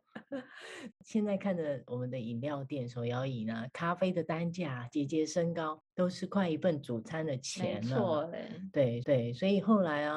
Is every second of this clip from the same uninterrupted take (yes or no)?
no